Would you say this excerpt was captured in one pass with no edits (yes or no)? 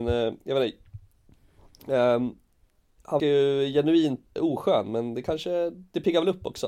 no